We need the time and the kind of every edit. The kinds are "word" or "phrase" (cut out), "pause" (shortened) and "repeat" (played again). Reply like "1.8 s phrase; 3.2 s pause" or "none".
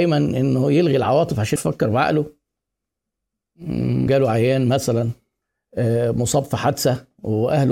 1.6 s word; 4.1 s word

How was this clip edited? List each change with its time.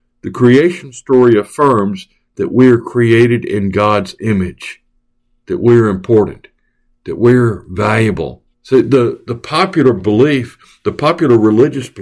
8.5 s pause

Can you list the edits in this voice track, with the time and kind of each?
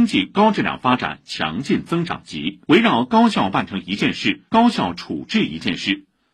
2.6 s pause; 4.5 s pause

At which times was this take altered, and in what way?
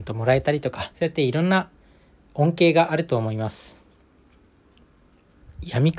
0.9 s pause

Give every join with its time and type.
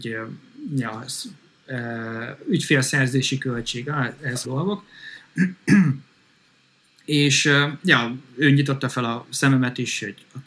4.4 s word

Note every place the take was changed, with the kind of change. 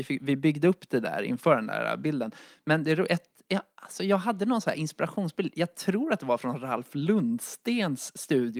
none

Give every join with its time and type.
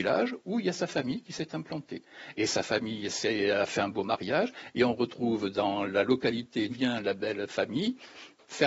6.7 s word

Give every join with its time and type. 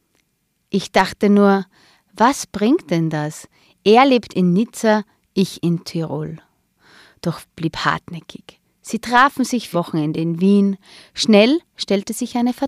7.4 s word; 9.7 s word

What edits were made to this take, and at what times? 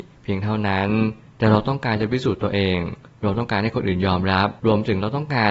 4.6 s pause

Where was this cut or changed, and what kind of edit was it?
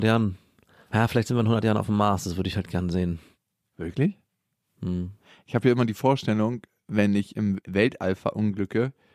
none

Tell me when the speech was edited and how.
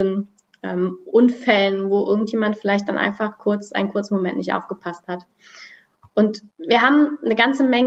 6.5 s pause

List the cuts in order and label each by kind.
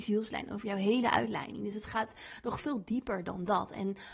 none

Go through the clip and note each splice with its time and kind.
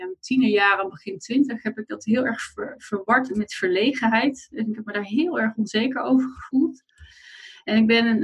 3.3 s word

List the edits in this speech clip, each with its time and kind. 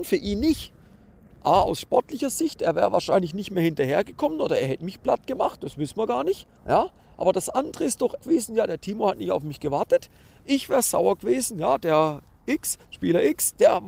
6.6 s pause; 8.2 s phrase; 12.8 s pause

